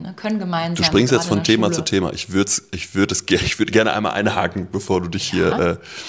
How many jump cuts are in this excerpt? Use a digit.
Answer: 0